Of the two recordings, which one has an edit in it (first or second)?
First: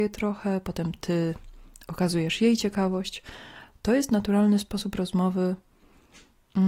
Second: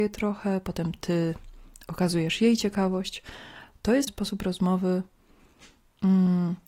second